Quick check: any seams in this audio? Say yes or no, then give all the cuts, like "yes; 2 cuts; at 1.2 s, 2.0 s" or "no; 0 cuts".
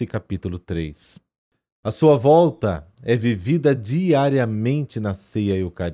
no; 0 cuts